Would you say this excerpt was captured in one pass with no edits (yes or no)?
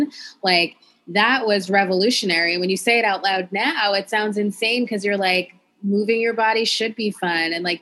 yes